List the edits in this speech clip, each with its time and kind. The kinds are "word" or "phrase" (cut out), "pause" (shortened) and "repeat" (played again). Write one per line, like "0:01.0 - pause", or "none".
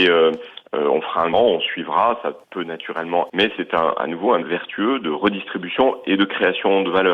0:01.3 - word
0:02.4 - pause
0:03.3 - word
0:04.4 - word

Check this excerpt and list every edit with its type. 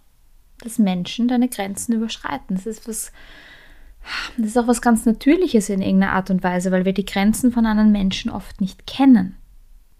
none

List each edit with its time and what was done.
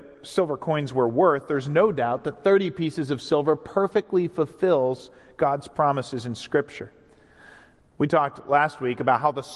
none

